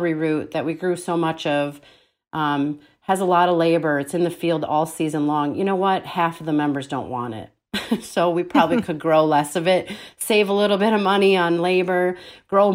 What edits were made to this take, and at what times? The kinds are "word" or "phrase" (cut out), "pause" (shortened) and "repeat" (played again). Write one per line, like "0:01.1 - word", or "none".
none